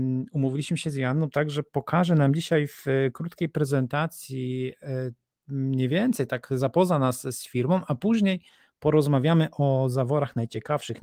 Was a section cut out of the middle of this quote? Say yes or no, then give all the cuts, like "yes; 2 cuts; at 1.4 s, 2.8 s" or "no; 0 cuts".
no; 0 cuts